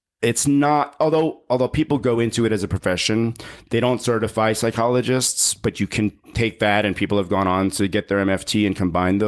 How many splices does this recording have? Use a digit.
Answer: 0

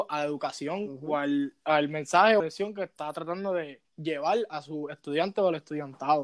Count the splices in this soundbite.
2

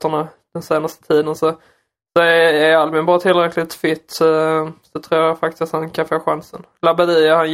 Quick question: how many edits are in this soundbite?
0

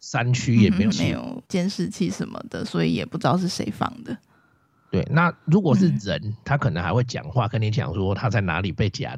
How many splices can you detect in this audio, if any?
2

